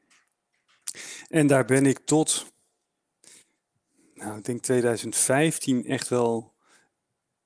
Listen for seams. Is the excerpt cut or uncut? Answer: uncut